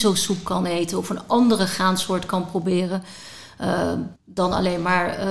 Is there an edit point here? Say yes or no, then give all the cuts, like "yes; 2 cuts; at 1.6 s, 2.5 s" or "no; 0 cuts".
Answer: yes; 1 cut; at 4.2 s